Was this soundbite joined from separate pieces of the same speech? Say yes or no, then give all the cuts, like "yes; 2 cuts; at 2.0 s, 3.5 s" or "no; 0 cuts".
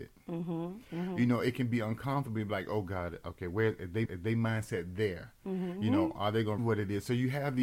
yes; 2 cuts; at 4.0 s, 6.6 s